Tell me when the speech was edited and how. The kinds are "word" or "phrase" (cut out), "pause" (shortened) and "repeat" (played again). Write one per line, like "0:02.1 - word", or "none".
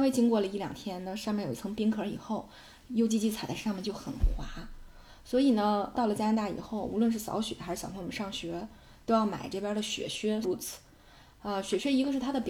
0:05.9 - word
0:10.4 - word